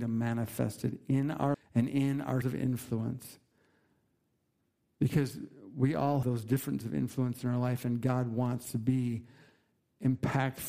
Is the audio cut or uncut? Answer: cut